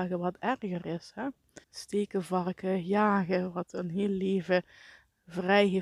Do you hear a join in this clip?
yes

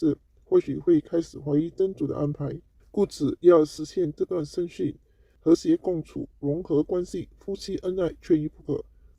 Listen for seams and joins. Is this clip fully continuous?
no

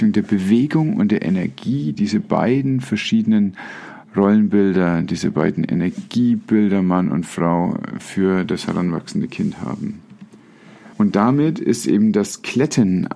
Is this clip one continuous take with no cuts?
no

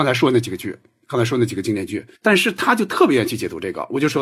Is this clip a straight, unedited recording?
no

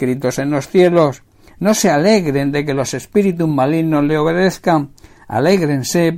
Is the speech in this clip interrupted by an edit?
no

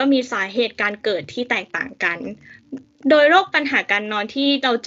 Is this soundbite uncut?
yes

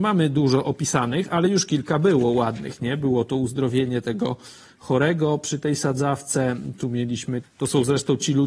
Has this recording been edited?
yes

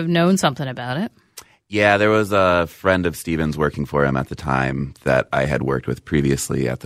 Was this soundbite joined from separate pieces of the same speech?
no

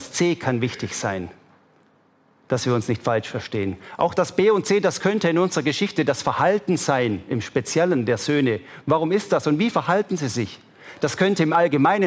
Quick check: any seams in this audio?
no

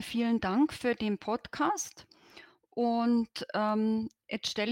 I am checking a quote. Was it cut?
no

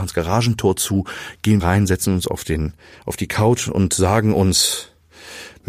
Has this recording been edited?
yes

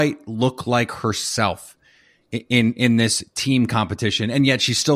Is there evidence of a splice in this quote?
no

